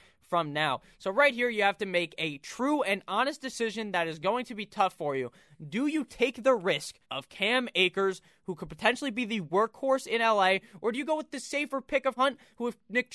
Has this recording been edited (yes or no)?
yes